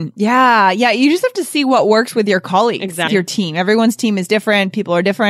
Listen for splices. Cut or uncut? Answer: cut